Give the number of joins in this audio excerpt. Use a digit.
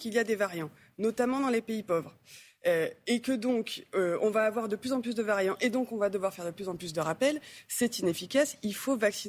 0